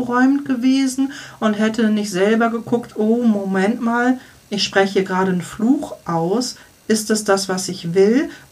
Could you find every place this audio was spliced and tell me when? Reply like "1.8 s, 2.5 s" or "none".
none